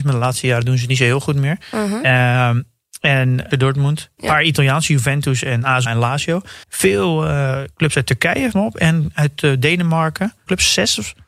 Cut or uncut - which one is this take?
cut